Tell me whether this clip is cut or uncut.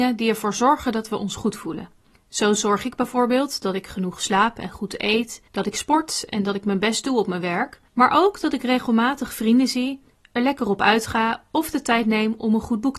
cut